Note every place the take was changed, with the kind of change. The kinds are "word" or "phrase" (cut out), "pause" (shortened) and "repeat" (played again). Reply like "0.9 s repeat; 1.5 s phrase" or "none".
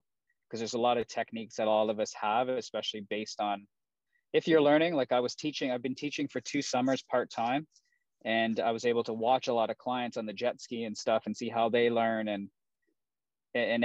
none